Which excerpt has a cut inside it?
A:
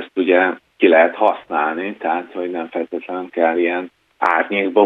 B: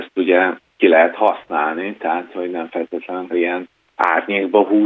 B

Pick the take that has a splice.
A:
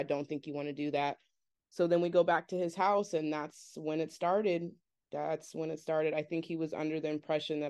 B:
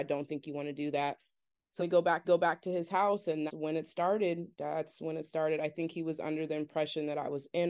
B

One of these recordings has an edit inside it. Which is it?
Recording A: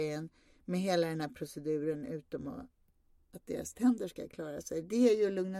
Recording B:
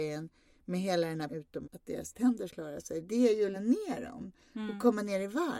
B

